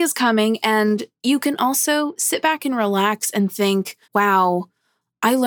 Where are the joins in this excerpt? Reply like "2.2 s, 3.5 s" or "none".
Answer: 4.0 s